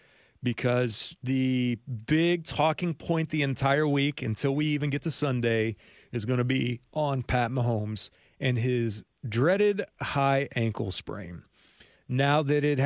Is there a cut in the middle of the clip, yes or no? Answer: no